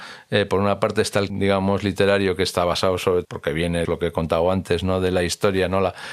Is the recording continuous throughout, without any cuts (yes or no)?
no